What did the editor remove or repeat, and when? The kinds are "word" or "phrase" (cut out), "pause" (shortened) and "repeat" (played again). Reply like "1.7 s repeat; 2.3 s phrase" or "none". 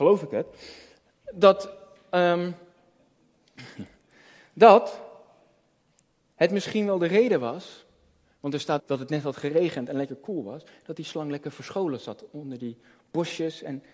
6.0 s pause; 8.8 s word